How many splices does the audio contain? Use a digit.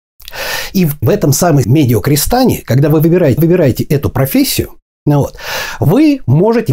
3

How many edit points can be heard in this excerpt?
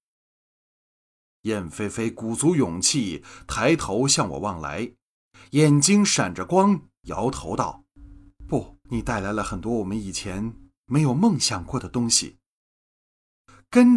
1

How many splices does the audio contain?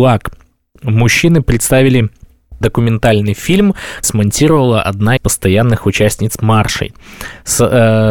3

